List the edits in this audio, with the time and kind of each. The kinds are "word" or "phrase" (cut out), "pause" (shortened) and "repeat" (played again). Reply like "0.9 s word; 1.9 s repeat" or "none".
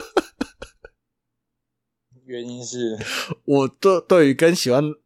none